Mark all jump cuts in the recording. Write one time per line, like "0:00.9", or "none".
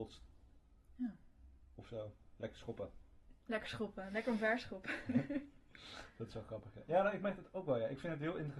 none

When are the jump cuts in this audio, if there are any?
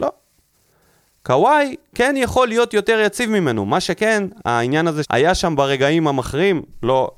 0:05.0

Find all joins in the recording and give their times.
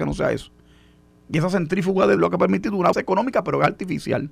0:02.2
0:02.9

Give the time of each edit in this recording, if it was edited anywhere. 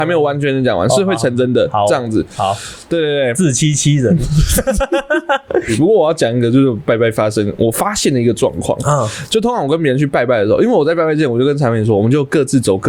none

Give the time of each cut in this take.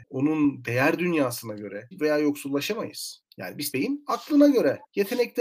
0:01.9
0:03.7

